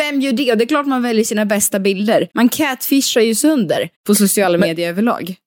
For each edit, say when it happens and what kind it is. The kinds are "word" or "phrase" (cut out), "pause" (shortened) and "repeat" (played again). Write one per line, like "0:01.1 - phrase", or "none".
0:02.3 - pause
0:03.9 - pause